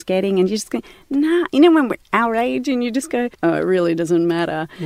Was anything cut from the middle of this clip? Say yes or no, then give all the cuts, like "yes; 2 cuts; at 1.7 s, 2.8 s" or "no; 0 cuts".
yes; 1 cut; at 3.3 s